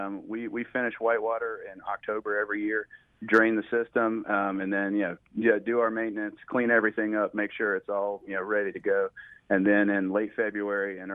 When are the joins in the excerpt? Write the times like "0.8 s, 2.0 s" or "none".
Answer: none